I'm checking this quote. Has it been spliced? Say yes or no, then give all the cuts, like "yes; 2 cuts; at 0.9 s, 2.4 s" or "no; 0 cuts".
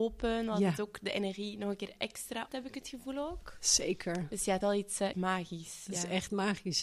yes; 3 cuts; at 2.5 s, 4.6 s, 5.1 s